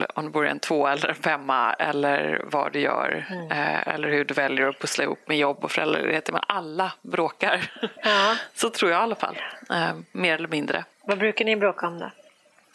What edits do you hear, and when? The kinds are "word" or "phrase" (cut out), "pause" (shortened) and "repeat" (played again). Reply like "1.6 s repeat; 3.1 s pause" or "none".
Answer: 10.9 s pause

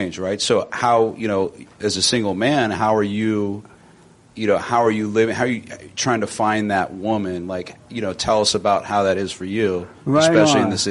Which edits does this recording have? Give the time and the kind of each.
none

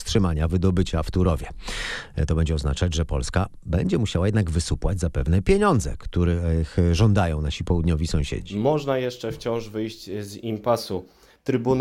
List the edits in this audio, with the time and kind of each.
none

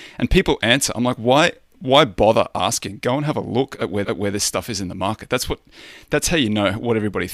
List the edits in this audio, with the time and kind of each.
4.0 s repeat

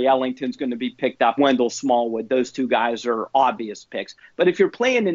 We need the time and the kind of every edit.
1.4 s phrase

